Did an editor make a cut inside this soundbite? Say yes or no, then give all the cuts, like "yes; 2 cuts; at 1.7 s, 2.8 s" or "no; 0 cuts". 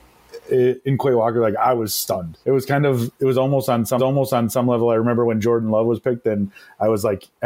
yes; 2 cuts; at 2.4 s, 4.0 s